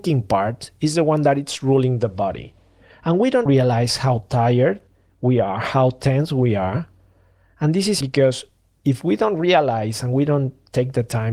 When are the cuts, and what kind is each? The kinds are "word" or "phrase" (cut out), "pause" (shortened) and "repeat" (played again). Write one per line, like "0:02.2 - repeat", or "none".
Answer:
0:03.5 - word
0:08.0 - word